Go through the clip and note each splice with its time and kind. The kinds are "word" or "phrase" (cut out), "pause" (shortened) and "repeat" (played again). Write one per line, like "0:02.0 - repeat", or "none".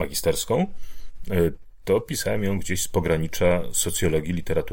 none